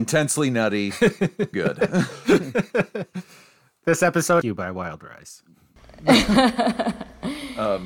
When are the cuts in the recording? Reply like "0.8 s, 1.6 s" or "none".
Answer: 1.5 s, 4.4 s